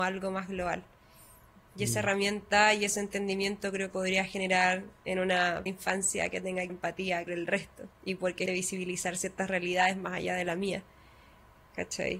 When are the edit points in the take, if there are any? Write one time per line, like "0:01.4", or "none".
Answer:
0:03.9
0:05.7
0:06.7
0:07.3
0:07.9
0:08.5

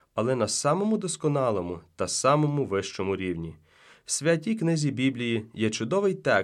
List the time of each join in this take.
none

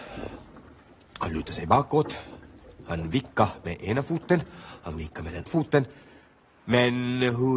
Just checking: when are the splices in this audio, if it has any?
0:05.5

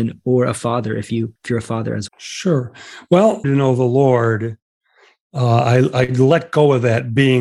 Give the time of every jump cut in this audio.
0:01.4
0:02.1
0:03.4

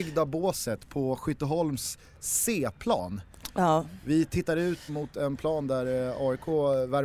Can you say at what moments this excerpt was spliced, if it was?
0:04.9

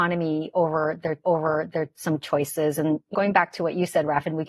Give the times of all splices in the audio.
0:01.2
0:03.1

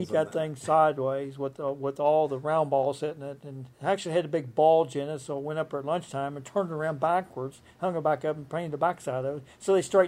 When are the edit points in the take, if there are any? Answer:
0:03.7

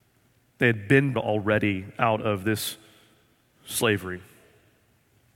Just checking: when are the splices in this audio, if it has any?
0:01.1

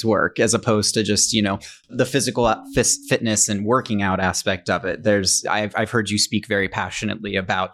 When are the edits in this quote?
none

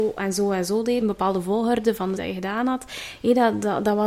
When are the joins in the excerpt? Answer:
0:01.0
0:02.2

